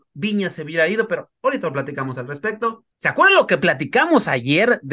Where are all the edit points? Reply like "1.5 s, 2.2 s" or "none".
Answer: 2.9 s